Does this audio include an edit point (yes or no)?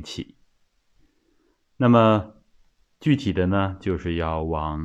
no